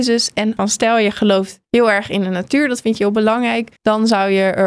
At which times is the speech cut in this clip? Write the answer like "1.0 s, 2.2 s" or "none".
1.6 s, 3.8 s